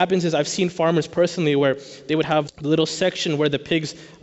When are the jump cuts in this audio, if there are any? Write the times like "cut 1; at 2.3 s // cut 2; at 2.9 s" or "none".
cut 1; at 2.5 s

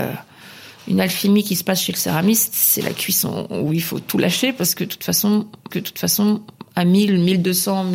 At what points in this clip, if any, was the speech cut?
cut 1; at 5.7 s

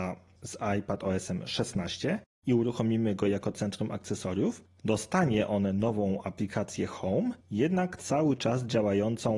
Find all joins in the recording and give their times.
cut 1; at 7.4 s

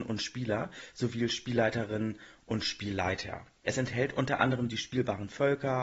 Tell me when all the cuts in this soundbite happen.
none

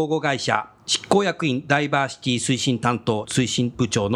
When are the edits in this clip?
cut 1; at 3.2 s

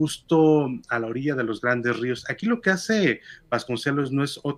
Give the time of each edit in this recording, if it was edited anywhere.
none

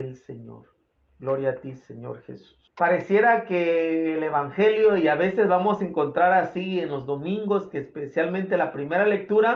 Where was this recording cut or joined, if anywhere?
cut 1; at 0.9 s // cut 2; at 2.7 s

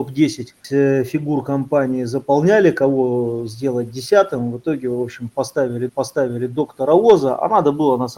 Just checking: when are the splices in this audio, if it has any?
cut 1; at 5.9 s

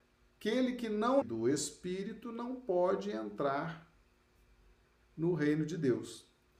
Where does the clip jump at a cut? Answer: cut 1; at 1.2 s

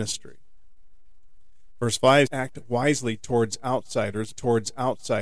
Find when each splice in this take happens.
cut 1; at 2.3 s // cut 2; at 4.3 s

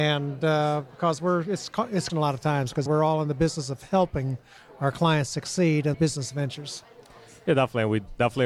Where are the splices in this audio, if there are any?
cut 1; at 2.1 s // cut 2; at 2.9 s // cut 3; at 5.9 s

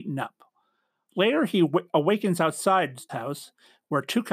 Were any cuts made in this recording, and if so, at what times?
cut 1; at 3.1 s

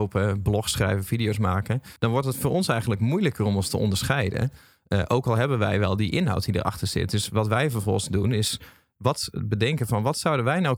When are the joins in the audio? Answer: cut 1; at 2.0 s

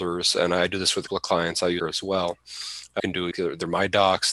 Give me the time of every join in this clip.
cut 1; at 1.1 s // cut 2; at 1.8 s // cut 3; at 3.0 s // cut 4; at 3.3 s

